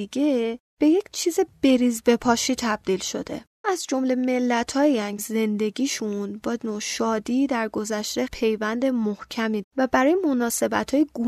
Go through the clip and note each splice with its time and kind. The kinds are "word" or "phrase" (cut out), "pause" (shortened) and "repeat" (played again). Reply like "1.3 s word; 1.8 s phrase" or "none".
3.6 s word; 5.2 s word; 6.6 s word; 8.3 s word; 9.6 s word